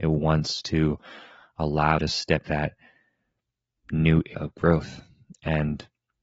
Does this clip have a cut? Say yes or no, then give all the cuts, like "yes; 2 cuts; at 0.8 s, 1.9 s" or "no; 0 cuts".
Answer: yes; 3 cuts; at 2.0 s, 2.5 s, 4.3 s